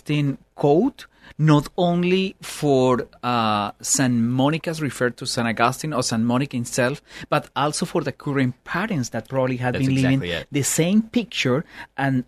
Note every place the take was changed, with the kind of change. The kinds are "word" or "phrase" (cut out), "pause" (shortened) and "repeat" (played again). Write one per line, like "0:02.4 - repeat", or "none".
none